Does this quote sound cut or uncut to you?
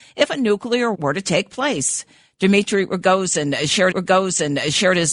cut